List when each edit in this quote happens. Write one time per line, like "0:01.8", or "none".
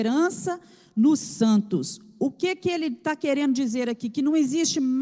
none